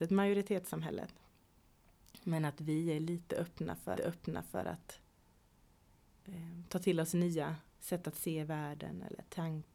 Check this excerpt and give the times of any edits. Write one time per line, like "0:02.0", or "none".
0:04.0
0:07.7

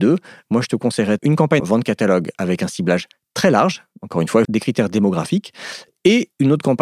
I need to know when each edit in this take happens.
0:01.2
0:01.6
0:04.4

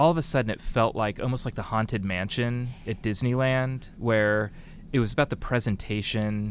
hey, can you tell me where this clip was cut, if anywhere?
none

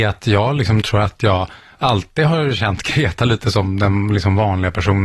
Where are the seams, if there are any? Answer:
none

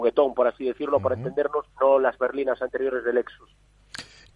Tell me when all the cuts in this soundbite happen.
0:01.7
0:02.2

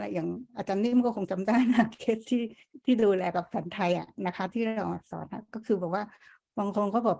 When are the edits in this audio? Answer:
none

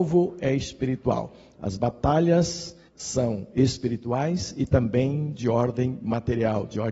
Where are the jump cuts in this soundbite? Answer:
0:02.9

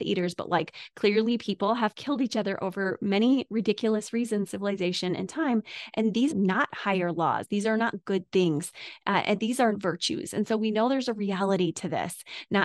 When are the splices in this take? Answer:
0:04.5
0:06.3
0:09.7

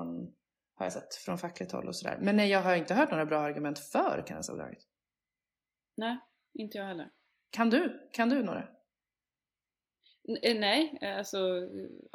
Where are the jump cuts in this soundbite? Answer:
none

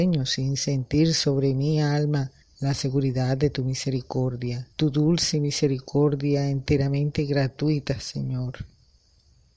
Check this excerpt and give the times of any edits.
0:02.4
0:04.7

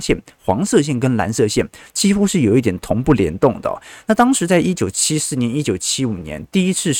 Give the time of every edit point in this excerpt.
none

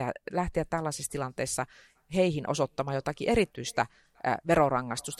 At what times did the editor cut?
none

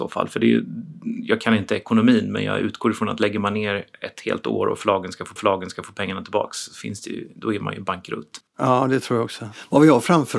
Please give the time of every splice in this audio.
0:05.4
0:08.5

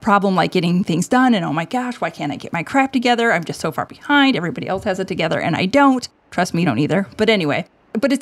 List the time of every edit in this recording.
0:06.6

